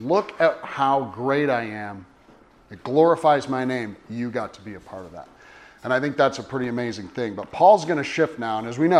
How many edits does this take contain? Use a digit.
0